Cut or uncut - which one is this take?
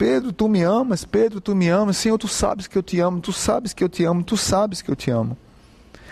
uncut